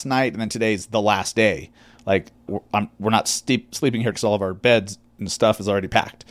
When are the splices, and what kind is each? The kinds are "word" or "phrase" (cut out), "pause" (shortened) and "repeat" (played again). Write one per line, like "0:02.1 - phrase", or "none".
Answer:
0:02.5 - word
0:04.1 - word